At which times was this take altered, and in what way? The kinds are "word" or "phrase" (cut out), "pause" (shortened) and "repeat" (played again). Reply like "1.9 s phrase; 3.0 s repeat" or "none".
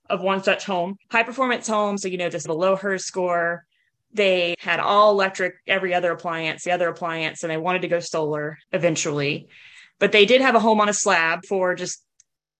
1.0 s pause; 2.5 s word; 4.5 s word; 6.7 s repeat; 8.6 s pause; 11.4 s word